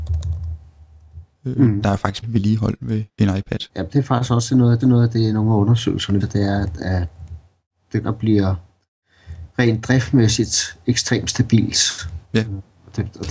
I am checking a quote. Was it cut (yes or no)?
yes